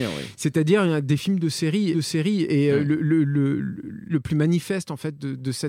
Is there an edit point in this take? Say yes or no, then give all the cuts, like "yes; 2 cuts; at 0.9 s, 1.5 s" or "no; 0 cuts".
yes; 2 cuts; at 1.9 s, 4.1 s